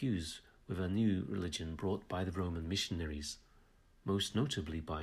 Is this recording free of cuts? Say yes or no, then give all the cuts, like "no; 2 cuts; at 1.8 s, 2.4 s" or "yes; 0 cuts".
yes; 0 cuts